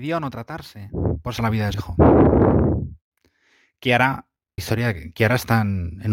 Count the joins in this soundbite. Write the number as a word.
three